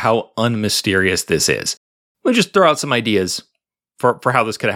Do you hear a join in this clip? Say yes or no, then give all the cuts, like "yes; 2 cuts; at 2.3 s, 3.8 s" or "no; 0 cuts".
no; 0 cuts